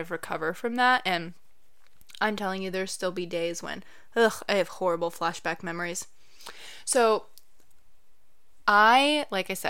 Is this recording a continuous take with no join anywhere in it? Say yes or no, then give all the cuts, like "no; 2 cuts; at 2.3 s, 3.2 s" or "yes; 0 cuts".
yes; 0 cuts